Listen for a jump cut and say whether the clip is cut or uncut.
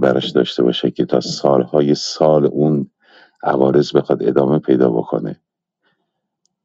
uncut